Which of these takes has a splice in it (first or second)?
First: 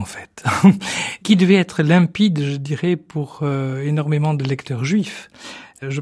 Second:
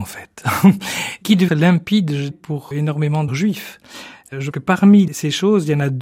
second